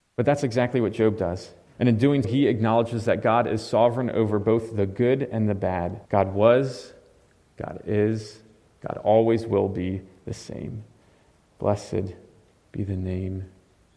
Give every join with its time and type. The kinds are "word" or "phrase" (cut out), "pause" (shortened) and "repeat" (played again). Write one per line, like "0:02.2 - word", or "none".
0:01.7 - pause
0:02.2 - word
0:06.1 - pause